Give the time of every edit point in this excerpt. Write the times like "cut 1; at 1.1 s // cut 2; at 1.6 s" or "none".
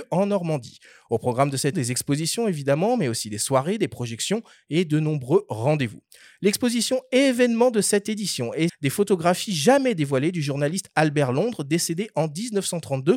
cut 1; at 1.7 s // cut 2; at 8.7 s